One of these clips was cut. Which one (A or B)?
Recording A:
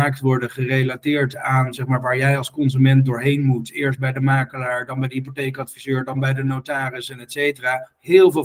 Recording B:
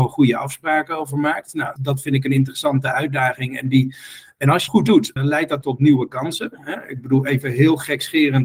B